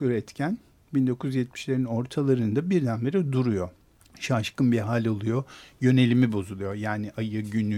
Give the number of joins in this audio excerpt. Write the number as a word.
one